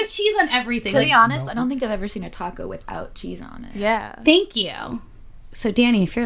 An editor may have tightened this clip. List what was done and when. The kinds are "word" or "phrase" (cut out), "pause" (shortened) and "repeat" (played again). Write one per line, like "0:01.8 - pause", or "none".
none